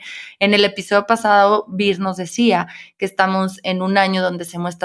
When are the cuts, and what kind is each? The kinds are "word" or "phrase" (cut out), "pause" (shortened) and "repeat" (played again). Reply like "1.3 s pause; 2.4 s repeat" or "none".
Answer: none

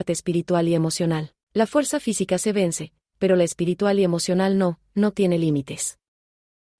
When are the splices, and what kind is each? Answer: 1.4 s pause

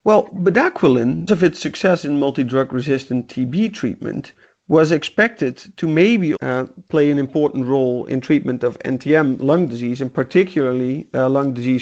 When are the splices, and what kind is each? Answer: 1.3 s word; 6.4 s word; 8.1 s word

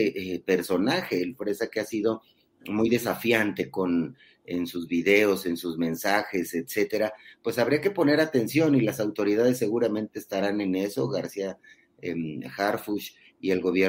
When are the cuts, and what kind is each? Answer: none

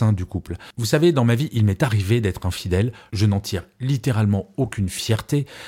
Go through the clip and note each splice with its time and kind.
none

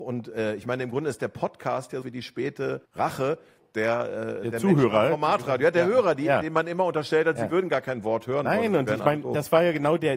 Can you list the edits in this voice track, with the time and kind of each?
2.0 s word; 2.8 s pause

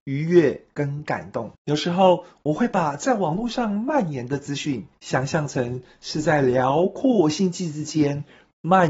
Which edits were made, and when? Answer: 1.5 s pause; 4.9 s pause

